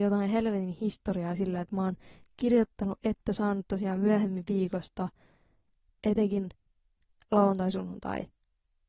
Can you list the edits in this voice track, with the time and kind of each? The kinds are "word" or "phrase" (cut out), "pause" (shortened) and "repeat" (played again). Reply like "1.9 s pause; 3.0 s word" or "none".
none